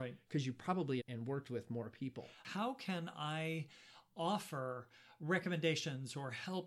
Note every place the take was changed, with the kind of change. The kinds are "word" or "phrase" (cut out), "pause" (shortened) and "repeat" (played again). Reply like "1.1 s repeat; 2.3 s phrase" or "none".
1.0 s phrase